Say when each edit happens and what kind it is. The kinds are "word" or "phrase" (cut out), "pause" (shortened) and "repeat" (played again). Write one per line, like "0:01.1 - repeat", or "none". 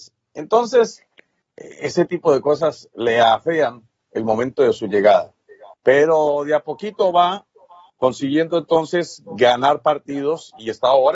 none

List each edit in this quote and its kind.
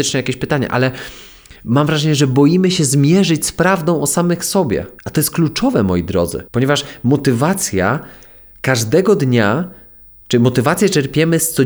0:01.6 - pause
0:05.0 - pause
0:06.5 - pause

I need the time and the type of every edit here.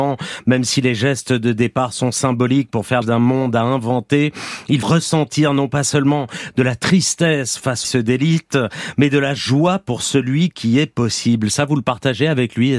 0:03.0 - word
0:04.8 - word
0:07.8 - phrase

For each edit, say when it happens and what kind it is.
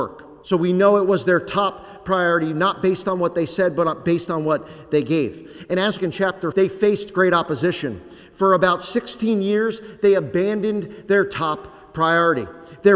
0:06.0 - phrase
0:06.5 - word

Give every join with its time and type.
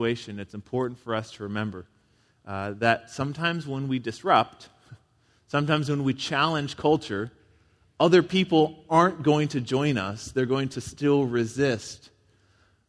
none

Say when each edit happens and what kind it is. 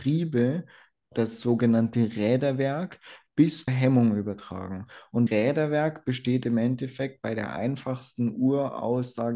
0:03.7 - word
0:05.3 - word

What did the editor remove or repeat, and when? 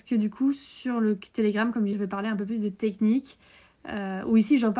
0:01.9 - word

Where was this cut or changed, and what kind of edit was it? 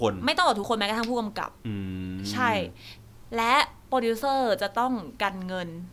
0:01.6 - pause

